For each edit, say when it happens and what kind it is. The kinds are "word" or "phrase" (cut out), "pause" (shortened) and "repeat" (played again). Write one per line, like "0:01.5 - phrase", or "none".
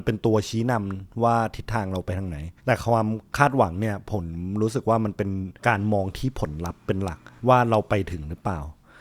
0:02.6 - pause
0:05.6 - pause
0:07.4 - pause